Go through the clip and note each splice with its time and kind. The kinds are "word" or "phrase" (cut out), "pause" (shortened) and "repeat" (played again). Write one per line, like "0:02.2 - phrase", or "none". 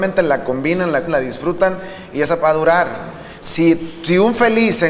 0:01.1 - word
0:02.4 - word